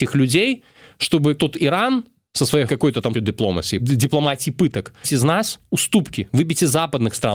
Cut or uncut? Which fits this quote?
cut